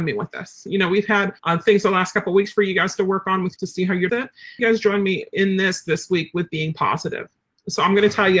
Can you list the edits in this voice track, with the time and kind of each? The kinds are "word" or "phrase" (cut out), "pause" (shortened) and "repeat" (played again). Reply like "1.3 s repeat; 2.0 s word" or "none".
1.4 s pause; 3.6 s phrase; 4.1 s phrase; 4.6 s phrase